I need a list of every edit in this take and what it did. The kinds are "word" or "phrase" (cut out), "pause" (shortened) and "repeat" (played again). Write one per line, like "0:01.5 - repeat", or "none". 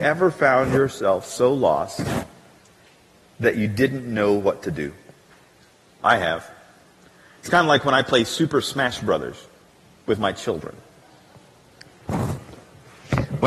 0:05.6 - pause